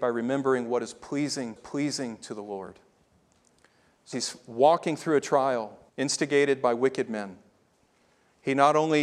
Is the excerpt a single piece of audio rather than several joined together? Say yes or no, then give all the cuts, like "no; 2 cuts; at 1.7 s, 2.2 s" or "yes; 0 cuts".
no; 3 cuts; at 1.6 s, 4.1 s, 5.9 s